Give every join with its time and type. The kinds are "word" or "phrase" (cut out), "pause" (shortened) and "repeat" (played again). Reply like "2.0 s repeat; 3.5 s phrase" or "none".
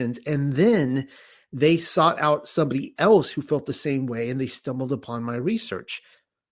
none